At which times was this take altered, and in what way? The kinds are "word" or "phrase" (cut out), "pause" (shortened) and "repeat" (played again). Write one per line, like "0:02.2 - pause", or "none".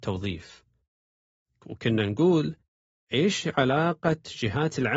none